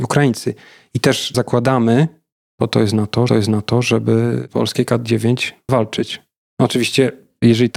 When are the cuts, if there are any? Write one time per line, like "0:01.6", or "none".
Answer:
0:01.3
0:03.3
0:05.7